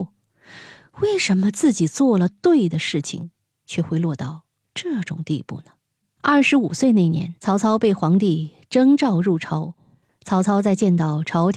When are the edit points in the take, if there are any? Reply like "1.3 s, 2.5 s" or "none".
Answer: 6.0 s